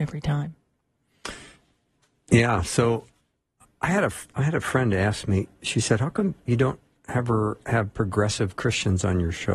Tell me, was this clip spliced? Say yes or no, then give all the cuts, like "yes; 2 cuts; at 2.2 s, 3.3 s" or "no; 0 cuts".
no; 0 cuts